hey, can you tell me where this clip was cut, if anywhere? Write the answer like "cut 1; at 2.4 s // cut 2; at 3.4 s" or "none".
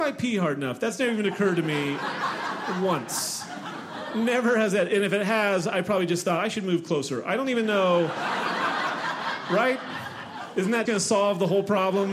cut 1; at 10.9 s